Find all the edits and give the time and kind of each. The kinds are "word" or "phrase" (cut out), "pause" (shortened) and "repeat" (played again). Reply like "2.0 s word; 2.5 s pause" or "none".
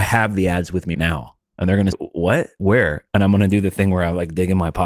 0.9 s word; 1.5 s pause; 1.9 s word